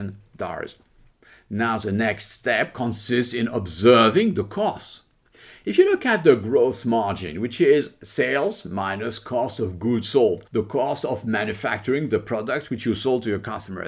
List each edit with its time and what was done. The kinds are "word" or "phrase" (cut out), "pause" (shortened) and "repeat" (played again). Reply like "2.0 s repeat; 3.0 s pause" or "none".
10.5 s pause